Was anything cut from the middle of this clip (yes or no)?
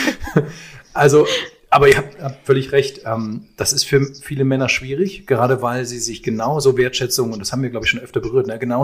no